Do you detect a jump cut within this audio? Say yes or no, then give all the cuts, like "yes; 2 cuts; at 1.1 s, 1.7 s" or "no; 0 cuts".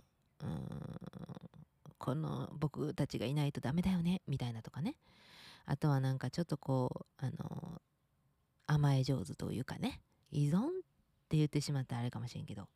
yes; 1 cut; at 10.2 s